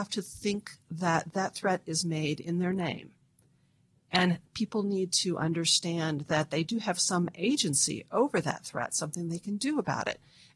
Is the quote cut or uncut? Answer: uncut